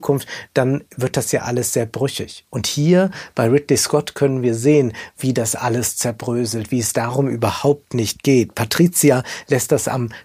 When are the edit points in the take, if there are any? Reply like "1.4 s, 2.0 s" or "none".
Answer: none